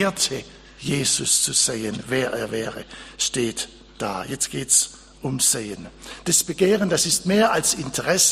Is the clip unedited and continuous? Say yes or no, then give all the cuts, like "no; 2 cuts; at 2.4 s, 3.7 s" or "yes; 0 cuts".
yes; 0 cuts